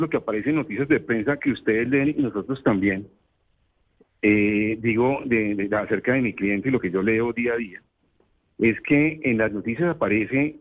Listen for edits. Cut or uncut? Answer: uncut